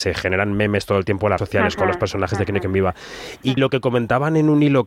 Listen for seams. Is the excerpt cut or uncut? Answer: cut